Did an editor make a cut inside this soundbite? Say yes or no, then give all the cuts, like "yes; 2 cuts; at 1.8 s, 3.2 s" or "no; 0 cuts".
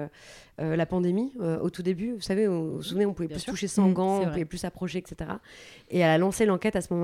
no; 0 cuts